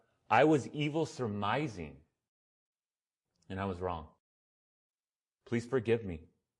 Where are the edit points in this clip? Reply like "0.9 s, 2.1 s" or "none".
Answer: none